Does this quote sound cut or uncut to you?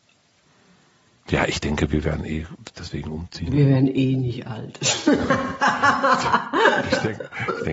uncut